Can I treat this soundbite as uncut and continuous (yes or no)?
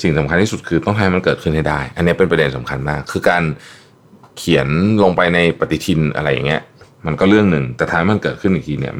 yes